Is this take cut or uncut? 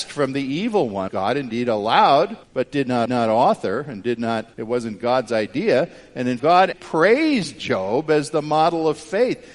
cut